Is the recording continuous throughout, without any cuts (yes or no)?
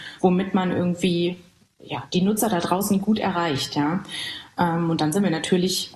yes